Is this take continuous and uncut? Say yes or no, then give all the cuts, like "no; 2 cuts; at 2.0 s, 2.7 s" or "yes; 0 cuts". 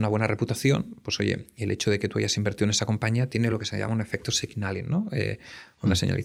yes; 0 cuts